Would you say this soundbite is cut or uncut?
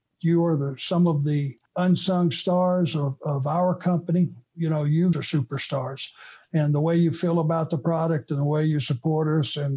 cut